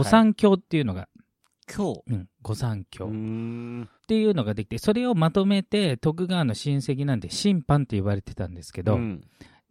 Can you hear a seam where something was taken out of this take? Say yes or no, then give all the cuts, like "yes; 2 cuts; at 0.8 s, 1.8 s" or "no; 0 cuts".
yes; 1 cut; at 4.0 s